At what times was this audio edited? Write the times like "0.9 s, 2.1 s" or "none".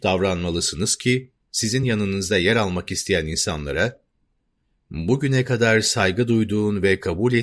none